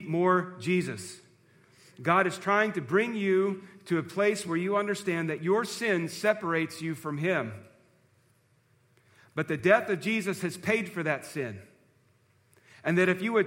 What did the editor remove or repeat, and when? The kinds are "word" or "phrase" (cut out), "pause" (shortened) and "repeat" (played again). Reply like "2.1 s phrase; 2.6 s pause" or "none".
none